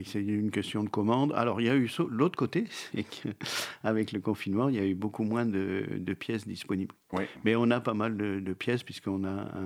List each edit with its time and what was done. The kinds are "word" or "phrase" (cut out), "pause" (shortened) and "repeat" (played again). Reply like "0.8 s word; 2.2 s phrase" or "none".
none